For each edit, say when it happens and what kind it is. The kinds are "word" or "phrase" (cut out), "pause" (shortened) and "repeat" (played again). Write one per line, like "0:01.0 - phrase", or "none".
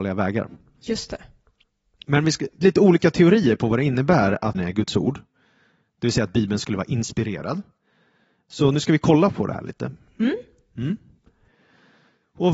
0:02.6 - word
0:04.5 - word